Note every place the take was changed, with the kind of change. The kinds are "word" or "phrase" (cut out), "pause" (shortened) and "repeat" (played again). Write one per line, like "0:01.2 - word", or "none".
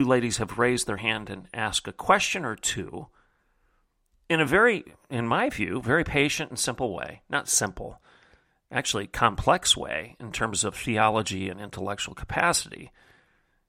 none